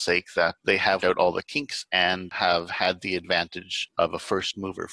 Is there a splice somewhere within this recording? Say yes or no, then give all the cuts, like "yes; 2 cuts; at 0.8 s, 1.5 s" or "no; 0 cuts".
yes; 1 cut; at 1.0 s